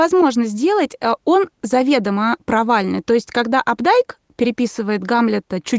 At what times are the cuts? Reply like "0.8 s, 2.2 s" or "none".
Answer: none